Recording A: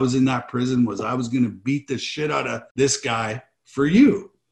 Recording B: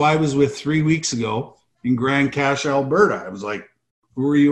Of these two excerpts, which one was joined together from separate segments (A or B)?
A